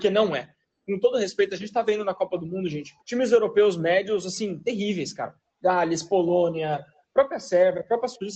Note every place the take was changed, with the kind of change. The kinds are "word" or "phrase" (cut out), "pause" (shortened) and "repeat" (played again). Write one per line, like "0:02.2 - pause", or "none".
0:03.0 - pause